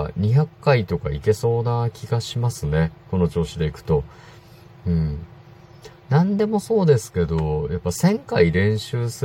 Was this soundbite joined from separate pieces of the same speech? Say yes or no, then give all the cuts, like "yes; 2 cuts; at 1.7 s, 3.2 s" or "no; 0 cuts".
no; 0 cuts